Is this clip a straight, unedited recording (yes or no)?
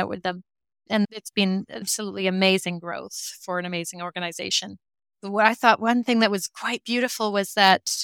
yes